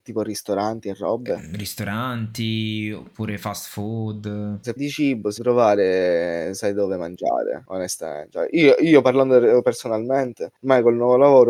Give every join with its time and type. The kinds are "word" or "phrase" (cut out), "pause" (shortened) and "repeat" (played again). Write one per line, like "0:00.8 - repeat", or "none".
0:04.8 - word
0:05.4 - word